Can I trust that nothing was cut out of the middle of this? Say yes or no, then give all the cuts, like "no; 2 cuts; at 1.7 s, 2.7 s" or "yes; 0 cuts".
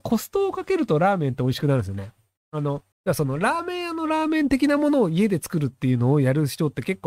no; 1 cut; at 2.9 s